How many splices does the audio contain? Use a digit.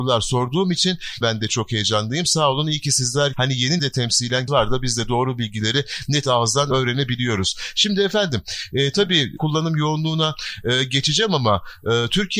6